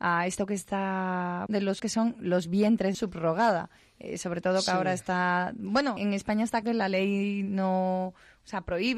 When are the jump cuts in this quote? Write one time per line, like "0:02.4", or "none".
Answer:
0:01.5
0:01.8
0:02.9
0:06.0
0:06.6